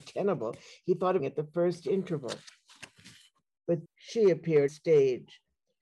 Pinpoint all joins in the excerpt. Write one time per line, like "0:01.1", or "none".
0:01.2
0:03.9
0:04.7

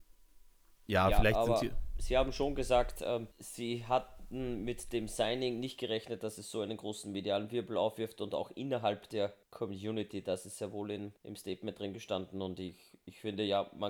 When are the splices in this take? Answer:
0:03.3
0:09.4
0:11.2

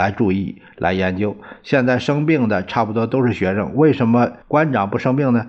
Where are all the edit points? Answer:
0:04.4

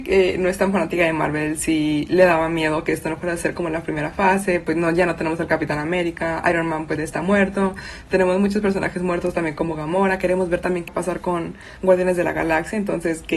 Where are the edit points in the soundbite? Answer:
0:07.0
0:10.9

